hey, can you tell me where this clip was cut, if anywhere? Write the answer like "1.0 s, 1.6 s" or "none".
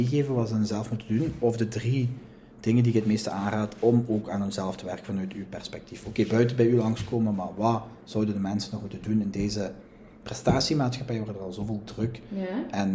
none